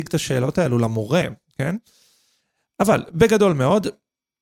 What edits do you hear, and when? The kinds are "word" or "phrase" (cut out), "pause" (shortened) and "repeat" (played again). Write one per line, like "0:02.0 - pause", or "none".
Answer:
none